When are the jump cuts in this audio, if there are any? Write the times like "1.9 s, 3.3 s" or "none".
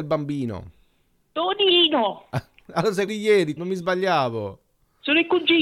3.1 s, 3.6 s